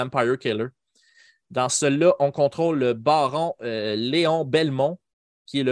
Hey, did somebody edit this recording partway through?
no; 0 cuts

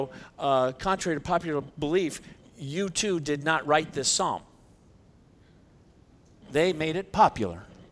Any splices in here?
no; 0 cuts

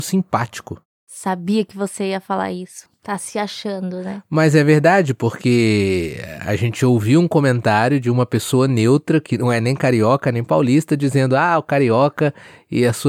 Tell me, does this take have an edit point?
no; 0 cuts

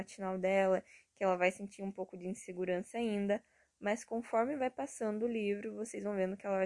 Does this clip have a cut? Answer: no; 0 cuts

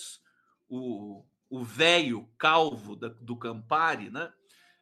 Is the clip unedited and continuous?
yes; 0 cuts

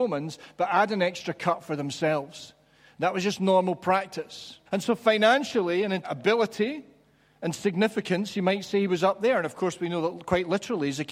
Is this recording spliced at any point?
yes; 2 cuts; at 4.7 s, 6.0 s

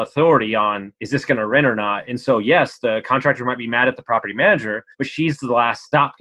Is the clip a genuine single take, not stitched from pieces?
no; 2 cuts; at 1.0 s, 4.9 s

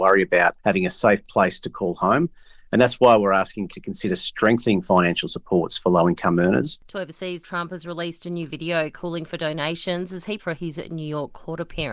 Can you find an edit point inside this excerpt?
yes; 3 cuts; at 3.7 s, 7.4 s, 10.4 s

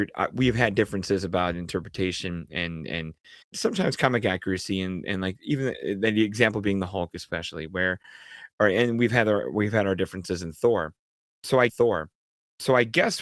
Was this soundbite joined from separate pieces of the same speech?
yes; 2 cuts; at 3.4 s, 11.7 s

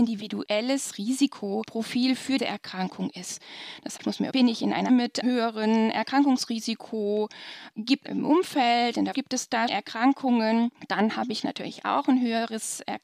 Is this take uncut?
no; 8 cuts; at 2.4 s, 4.0 s, 4.3 s, 4.9 s, 5.2 s, 8.0 s, 9.1 s, 9.7 s

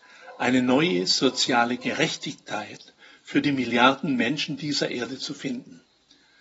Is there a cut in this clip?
no; 0 cuts

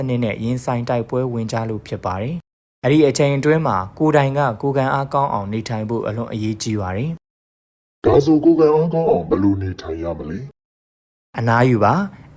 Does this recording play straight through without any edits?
yes; 0 cuts

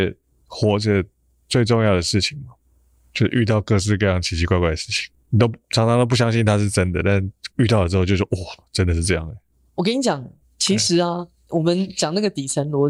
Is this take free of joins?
no; 1 cut; at 11.5 s

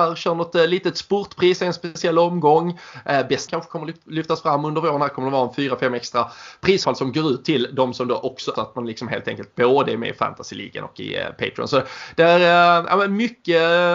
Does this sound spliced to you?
yes; 3 cuts; at 3.5 s, 6.8 s, 8.6 s

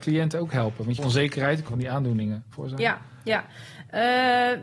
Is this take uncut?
no; 3 cuts; at 1.0 s, 1.7 s, 2.5 s

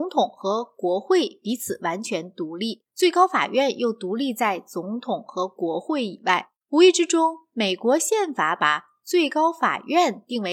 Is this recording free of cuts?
no; 2 cuts; at 2.9 s, 6.6 s

